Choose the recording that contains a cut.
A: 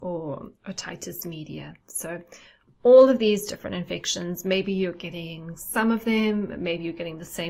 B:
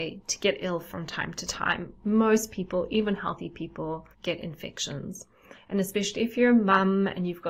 B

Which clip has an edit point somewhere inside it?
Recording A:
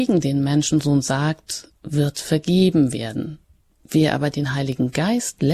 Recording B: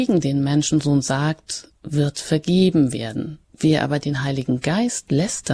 B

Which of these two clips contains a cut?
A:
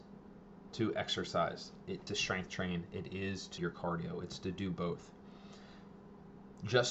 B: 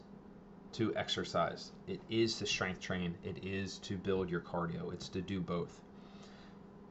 A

